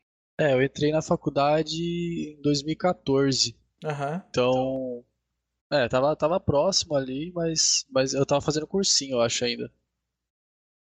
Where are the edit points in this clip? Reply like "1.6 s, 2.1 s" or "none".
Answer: none